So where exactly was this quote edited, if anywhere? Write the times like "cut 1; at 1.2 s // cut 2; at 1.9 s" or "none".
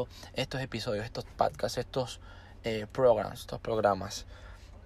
none